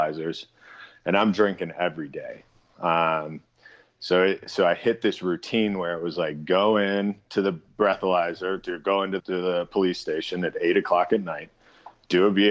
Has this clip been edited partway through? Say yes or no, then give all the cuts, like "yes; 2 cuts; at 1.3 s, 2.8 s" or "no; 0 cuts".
yes; 1 cut; at 9.2 s